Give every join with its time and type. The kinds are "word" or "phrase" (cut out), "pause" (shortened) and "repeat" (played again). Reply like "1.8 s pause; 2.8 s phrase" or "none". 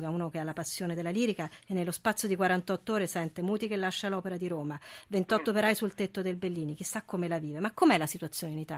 none